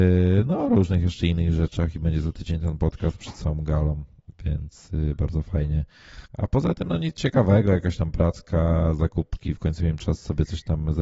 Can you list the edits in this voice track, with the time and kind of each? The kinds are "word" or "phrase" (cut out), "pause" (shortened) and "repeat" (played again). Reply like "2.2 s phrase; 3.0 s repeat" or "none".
6.3 s pause